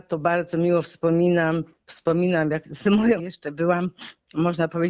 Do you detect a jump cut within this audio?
yes; 2 cuts; at 2.6 s, 3.2 s

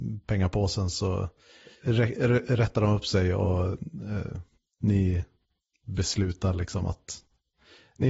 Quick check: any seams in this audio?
no; 0 cuts

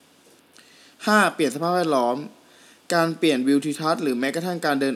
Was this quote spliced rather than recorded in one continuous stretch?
no; 0 cuts

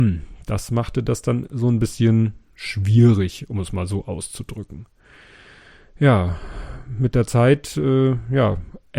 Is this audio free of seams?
yes; 0 cuts

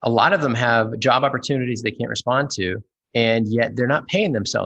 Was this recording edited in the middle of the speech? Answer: no; 0 cuts

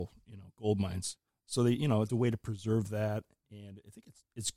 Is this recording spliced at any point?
yes; 2 cuts; at 1.3 s, 2.1 s

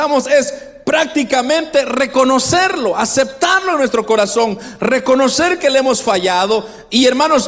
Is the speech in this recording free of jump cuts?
yes; 0 cuts

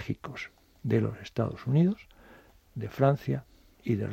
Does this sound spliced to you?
no; 0 cuts

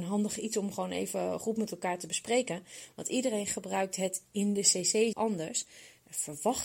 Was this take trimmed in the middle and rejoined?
yes; 1 cut; at 5.1 s

